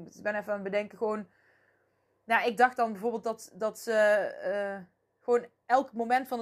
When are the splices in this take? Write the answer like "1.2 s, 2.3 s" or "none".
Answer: none

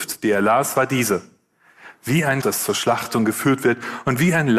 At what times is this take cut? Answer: 2.4 s

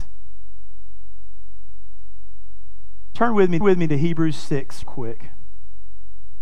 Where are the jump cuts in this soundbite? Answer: 3.6 s, 4.8 s

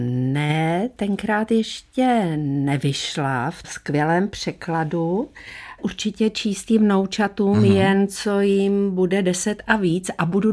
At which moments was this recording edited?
3.6 s, 5.8 s

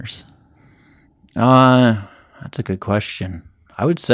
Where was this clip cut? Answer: none

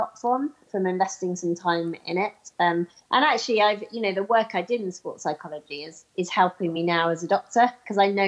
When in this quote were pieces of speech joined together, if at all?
none

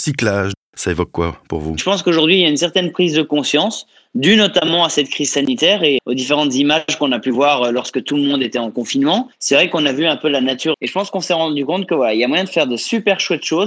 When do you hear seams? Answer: 6.0 s, 9.3 s, 10.7 s

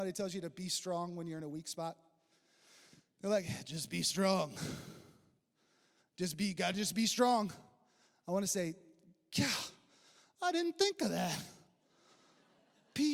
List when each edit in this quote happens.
none

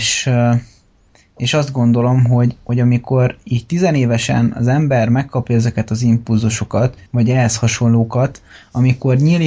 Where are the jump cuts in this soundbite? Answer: 7.1 s

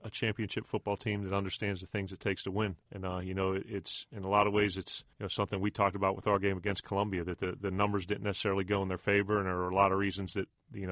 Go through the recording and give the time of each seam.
2.8 s, 5.1 s

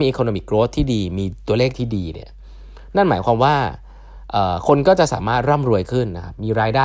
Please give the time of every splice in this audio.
1.7 s

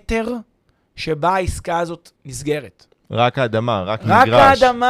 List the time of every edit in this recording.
2.2 s

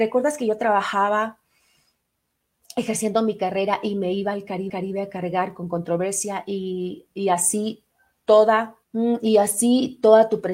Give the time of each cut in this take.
4.7 s, 8.8 s

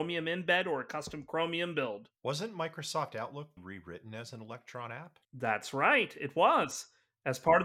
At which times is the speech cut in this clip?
2.2 s, 3.6 s, 5.2 s

